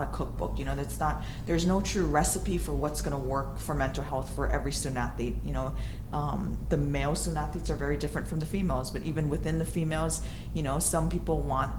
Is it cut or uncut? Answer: uncut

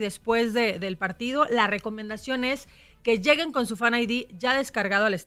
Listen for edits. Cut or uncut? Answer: uncut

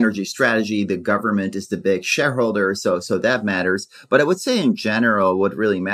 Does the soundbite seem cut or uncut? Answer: uncut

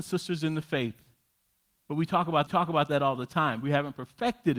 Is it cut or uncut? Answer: cut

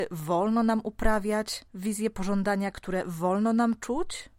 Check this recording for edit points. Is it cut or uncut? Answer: cut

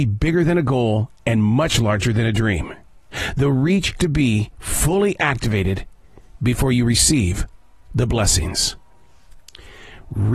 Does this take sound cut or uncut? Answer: cut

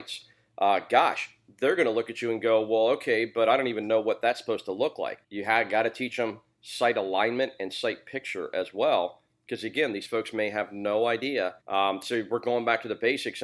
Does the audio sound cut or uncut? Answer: cut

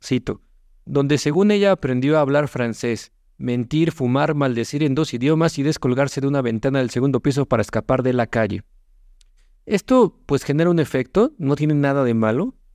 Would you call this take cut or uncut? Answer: uncut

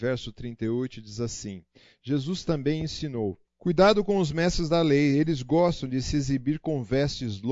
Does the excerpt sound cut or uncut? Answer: cut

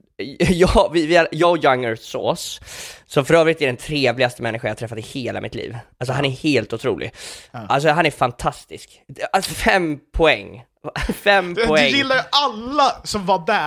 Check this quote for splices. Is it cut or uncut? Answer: uncut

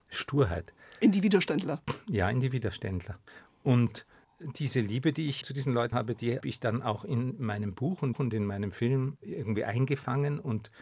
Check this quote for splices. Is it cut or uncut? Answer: cut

